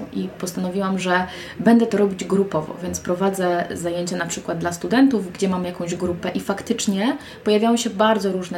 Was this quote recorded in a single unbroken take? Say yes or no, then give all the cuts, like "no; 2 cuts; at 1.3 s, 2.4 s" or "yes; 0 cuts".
yes; 0 cuts